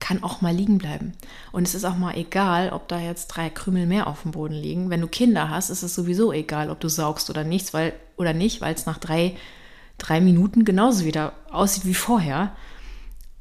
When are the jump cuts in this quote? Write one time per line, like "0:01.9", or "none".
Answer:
none